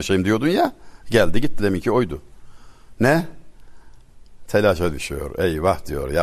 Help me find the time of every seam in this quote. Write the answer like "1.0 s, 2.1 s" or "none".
1.6 s